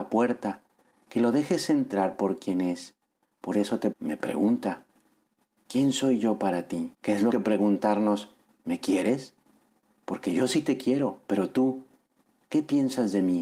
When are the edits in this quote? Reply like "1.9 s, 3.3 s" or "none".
3.9 s, 6.9 s, 7.3 s